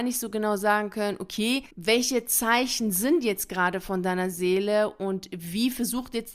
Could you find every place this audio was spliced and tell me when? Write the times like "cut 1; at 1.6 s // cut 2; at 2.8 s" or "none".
cut 1; at 1.7 s